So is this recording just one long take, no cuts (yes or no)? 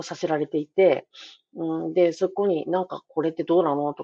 yes